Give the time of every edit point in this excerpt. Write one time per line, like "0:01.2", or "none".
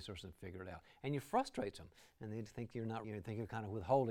0:03.0